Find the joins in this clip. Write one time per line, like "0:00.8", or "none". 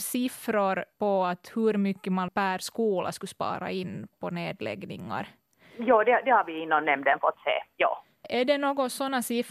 0:04.1